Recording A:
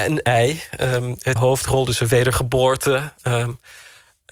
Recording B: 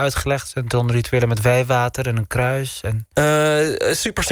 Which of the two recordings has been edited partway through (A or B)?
A